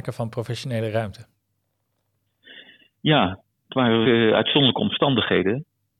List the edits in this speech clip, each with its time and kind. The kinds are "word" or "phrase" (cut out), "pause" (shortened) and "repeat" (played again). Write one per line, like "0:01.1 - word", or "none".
0:04.0 - word